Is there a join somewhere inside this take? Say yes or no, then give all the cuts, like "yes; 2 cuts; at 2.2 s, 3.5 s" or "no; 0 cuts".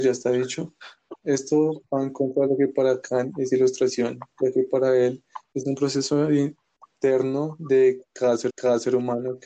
yes; 1 cut; at 8.5 s